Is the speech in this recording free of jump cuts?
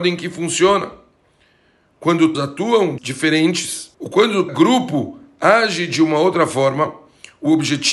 no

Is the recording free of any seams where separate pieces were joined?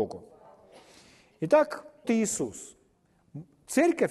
no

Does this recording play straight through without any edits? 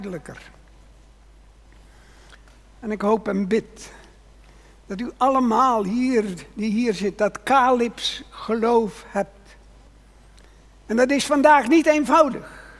yes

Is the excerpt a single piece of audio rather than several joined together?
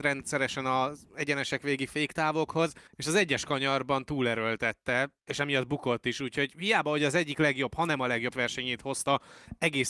no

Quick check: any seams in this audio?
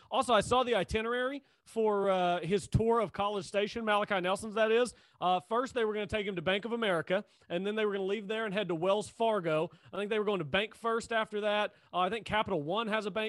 no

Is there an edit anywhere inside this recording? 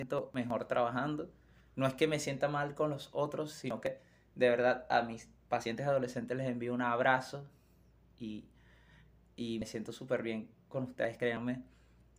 no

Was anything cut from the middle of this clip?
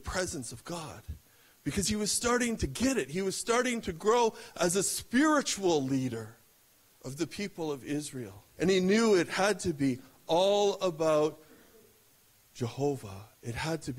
yes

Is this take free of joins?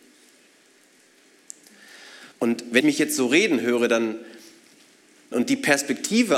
no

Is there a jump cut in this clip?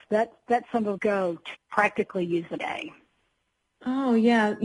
yes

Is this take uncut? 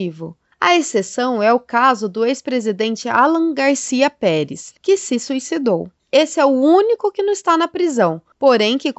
yes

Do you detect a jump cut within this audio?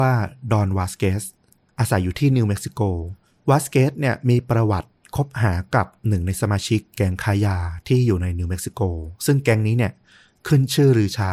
no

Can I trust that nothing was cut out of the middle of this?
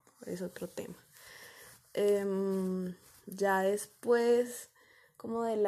yes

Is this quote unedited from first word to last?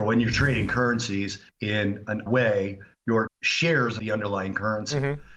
no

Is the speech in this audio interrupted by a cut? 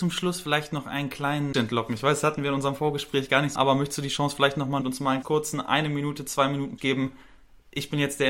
yes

